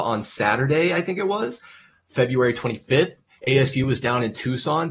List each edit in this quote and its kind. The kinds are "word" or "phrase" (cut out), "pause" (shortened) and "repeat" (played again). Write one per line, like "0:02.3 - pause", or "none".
none